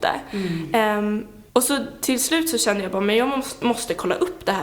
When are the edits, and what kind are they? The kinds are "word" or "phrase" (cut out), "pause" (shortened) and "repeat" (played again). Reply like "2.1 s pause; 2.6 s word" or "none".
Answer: 1.5 s pause